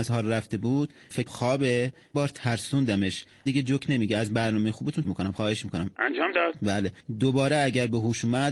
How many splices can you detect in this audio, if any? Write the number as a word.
four